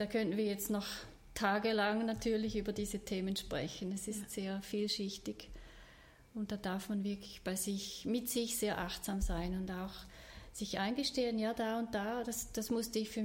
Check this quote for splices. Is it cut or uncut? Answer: uncut